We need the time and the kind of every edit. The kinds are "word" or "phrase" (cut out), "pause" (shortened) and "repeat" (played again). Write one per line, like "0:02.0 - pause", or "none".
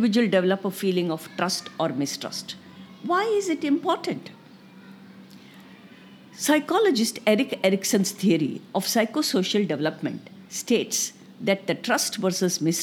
none

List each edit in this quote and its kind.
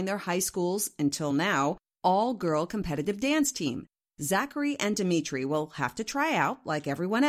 none

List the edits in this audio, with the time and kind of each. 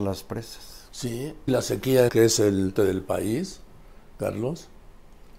0:01.5 - word
0:02.1 - phrase
0:02.8 - phrase

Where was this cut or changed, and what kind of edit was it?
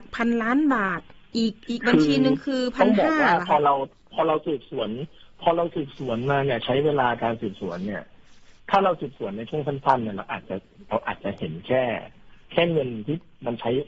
0:01.3 - pause
0:01.6 - pause
0:08.6 - pause
0:12.4 - pause

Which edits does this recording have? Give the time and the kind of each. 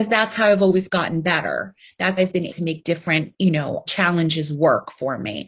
0:02.2 - word
0:02.5 - word
0:03.9 - word

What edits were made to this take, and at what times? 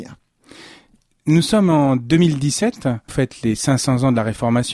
0:03.1 - phrase

